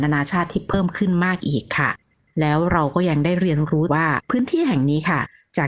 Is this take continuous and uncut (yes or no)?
no